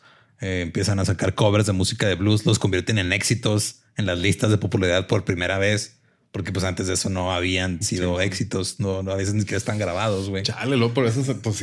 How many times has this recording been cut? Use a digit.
0